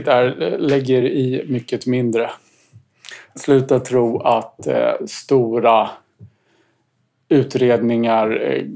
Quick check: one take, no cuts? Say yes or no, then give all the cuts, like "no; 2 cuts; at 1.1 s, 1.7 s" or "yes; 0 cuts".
yes; 0 cuts